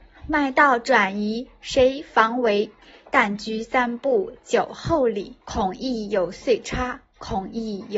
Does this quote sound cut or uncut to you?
cut